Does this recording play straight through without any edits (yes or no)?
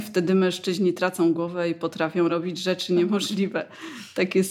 yes